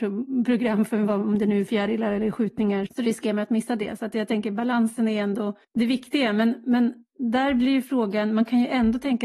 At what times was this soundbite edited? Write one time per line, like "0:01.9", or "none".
0:02.9
0:05.6

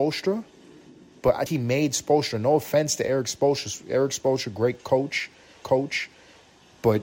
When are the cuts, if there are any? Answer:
0:01.5
0:05.6

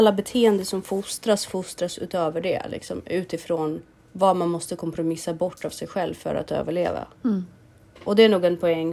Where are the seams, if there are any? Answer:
0:04.0
0:07.1

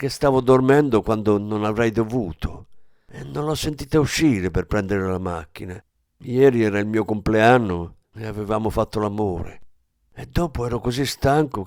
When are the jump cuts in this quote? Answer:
none

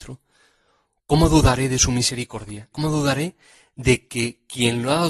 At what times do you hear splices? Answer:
0:02.7

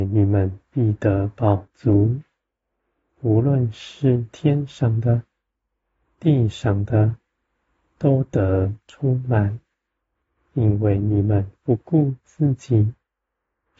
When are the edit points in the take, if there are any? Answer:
none

